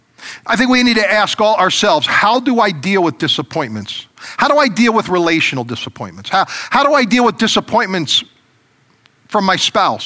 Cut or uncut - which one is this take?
uncut